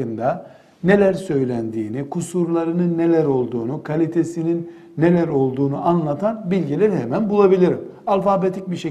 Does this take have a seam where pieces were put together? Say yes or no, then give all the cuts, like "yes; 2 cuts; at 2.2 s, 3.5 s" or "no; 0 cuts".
no; 0 cuts